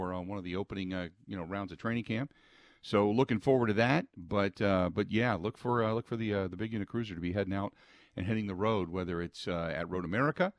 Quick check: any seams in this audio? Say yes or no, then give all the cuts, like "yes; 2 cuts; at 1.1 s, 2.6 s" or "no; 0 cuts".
no; 0 cuts